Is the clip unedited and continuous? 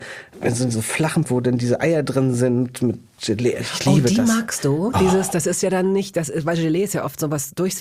no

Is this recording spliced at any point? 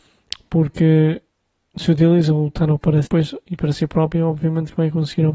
yes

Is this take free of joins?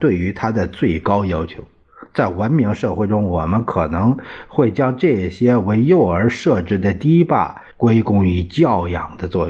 no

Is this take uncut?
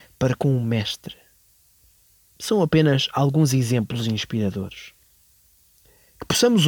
yes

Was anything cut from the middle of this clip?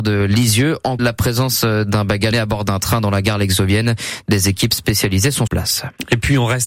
yes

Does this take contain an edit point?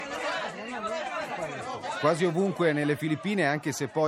no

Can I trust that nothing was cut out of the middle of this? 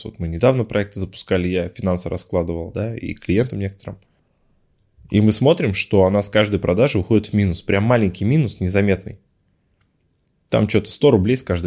yes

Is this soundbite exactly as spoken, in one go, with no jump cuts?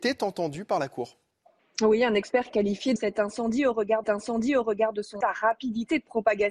no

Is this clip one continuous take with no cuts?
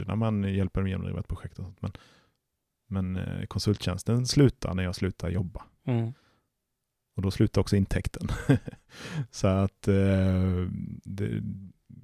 yes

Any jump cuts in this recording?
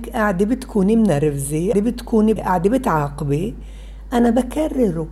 yes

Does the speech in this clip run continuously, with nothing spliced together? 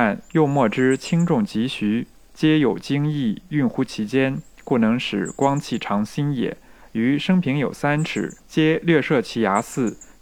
no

